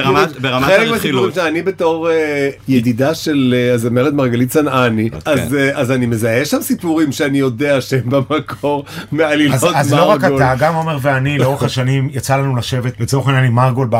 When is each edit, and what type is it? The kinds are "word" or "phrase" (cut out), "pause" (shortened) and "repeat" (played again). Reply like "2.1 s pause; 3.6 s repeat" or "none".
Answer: none